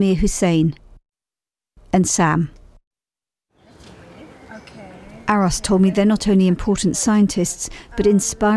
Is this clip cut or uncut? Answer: uncut